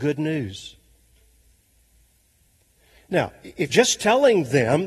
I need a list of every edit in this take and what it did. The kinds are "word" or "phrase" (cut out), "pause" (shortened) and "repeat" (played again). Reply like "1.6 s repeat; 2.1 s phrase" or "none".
3.7 s word